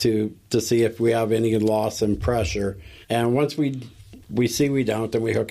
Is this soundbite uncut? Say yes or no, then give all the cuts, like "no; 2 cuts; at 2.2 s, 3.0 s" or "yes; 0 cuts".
no; 2 cuts; at 3.0 s, 4.2 s